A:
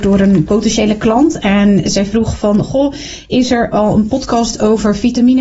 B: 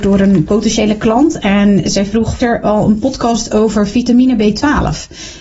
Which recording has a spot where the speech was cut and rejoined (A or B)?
B